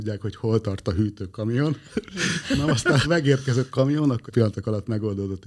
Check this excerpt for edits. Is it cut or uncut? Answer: cut